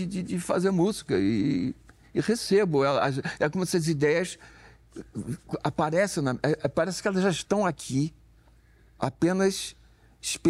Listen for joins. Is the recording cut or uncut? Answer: uncut